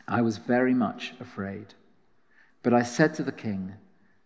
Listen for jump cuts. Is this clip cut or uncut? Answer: uncut